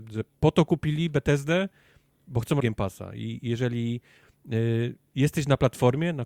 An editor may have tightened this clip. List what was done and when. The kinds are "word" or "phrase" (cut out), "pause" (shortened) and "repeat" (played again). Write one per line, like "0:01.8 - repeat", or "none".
0:02.6 - word